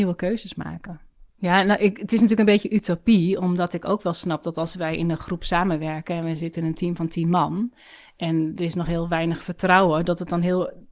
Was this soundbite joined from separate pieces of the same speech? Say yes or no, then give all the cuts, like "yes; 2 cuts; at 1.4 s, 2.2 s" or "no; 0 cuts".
yes; 1 cut; at 1.3 s